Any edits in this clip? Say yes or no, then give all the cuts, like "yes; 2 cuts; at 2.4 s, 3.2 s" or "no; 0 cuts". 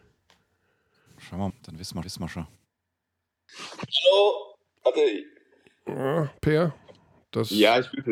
yes; 2 cuts; at 1.5 s, 2.0 s